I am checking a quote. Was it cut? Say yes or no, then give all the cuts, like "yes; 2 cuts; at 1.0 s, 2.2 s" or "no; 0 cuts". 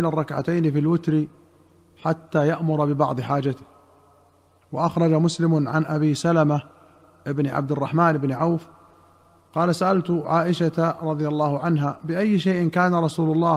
no; 0 cuts